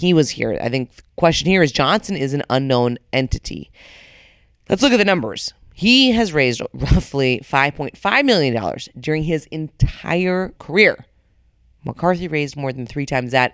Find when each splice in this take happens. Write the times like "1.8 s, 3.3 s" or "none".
10.6 s